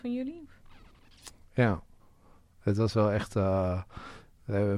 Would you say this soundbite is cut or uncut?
uncut